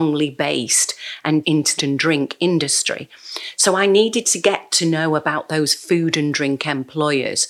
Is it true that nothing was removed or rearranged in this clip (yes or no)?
no